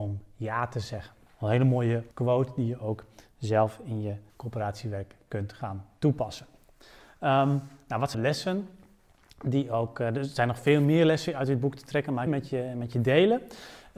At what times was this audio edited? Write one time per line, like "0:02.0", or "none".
0:01.3
0:02.1
0:04.3
0:08.1
0:12.3